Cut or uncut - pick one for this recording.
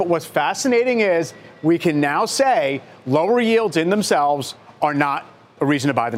uncut